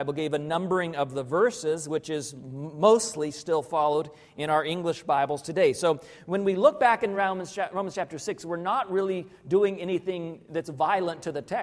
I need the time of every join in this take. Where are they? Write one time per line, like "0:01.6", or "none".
none